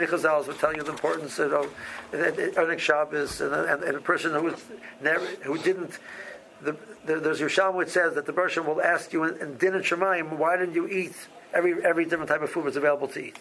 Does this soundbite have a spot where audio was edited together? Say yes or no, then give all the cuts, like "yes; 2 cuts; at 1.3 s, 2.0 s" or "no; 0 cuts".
no; 0 cuts